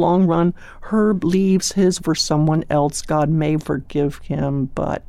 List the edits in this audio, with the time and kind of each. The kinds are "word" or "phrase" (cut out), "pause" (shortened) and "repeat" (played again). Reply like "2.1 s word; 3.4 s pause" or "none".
2.0 s word; 3.6 s word

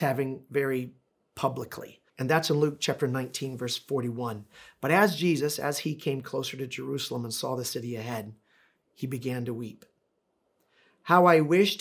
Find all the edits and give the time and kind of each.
2.1 s pause

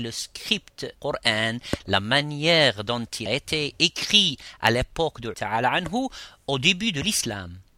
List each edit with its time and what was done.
1.0 s word; 3.3 s word; 5.3 s word

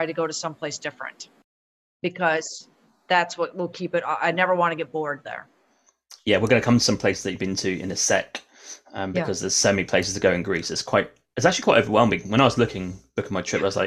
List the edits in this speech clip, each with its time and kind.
none

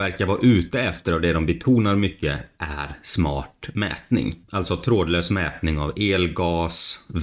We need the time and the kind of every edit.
4.4 s pause

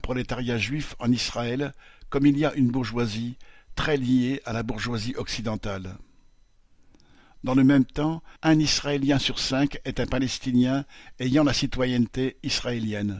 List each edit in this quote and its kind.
8.4 s pause

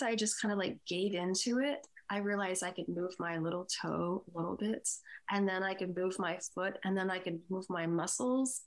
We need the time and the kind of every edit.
none

